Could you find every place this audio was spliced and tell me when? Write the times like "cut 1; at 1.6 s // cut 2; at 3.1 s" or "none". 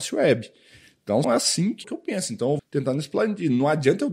cut 1; at 1.2 s // cut 2; at 1.8 s // cut 3; at 2.6 s